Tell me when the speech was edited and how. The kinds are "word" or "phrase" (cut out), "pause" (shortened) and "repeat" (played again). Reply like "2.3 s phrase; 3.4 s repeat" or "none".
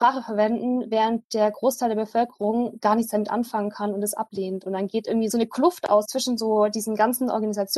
5.3 s phrase; 6.1 s word